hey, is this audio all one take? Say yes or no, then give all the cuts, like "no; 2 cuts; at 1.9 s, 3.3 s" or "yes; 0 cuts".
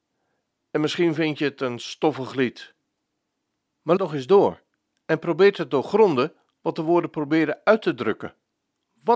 no; 1 cut; at 4.0 s